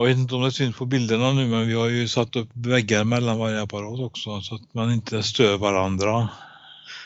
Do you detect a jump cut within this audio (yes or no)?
no